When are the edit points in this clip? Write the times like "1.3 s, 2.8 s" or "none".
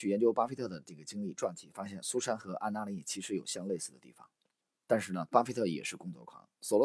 4.6 s